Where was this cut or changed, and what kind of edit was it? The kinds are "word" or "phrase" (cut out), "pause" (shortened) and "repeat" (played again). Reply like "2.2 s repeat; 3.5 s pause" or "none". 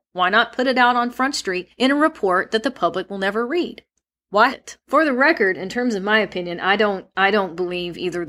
1.7 s pause; 4.5 s word; 4.8 s pause